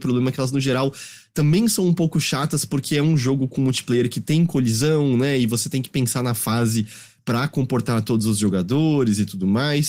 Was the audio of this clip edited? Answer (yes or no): no